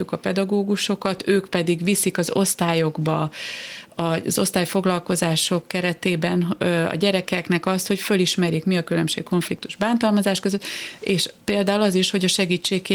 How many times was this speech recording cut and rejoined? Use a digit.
1